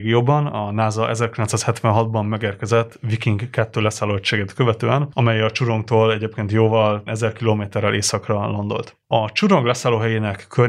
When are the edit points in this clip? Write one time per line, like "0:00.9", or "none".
0:07.1

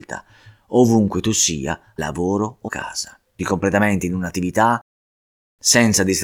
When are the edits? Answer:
0:02.0
0:02.7
0:03.4

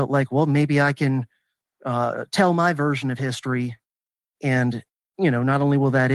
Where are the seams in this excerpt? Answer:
none

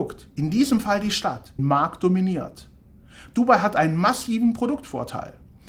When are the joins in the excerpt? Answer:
0:01.6

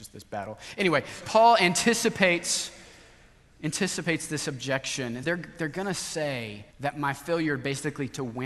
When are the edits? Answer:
0:01.2
0:05.2
0:06.7

